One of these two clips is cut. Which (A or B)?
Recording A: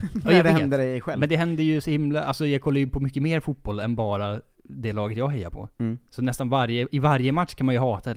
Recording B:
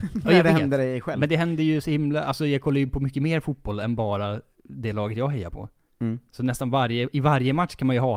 A